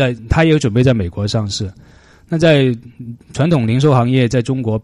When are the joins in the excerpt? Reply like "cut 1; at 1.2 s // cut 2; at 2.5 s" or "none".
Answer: none